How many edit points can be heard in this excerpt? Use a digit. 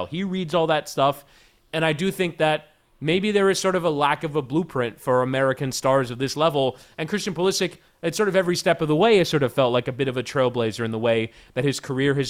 0